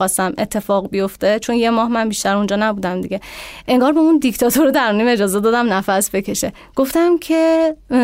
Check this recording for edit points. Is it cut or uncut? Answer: cut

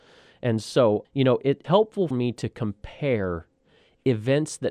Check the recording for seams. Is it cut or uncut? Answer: cut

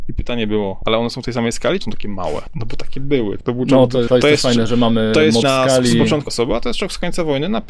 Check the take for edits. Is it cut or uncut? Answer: cut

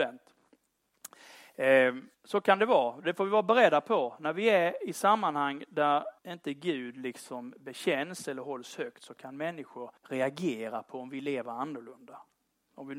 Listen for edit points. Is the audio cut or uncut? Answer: cut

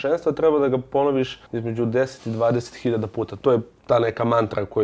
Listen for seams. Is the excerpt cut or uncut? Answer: cut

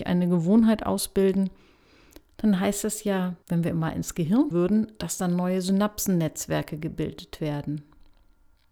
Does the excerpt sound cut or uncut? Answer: cut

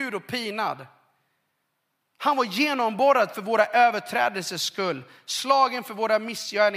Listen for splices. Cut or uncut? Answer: uncut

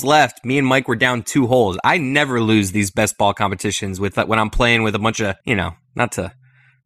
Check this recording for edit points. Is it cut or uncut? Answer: cut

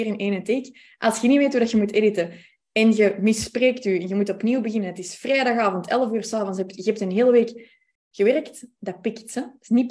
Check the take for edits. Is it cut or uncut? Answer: uncut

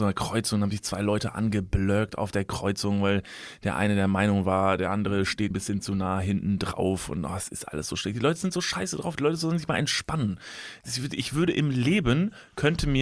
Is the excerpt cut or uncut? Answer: cut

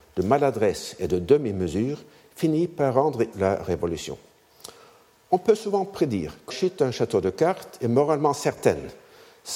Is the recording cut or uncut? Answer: cut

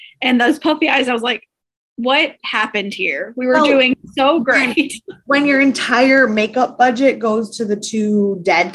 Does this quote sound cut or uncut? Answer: uncut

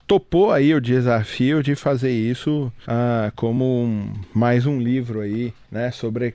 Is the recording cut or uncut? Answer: uncut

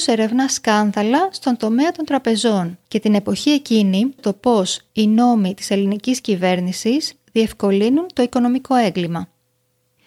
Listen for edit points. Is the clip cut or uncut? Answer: cut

